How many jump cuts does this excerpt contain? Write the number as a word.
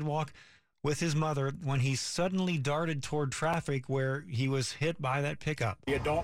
zero